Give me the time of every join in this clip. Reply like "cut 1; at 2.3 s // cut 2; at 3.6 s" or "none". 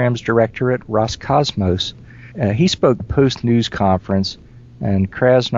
cut 1; at 2.3 s // cut 2; at 3.0 s // cut 3; at 3.4 s